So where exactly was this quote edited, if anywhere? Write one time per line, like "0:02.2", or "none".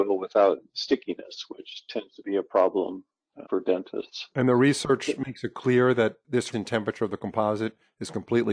0:03.4
0:06.5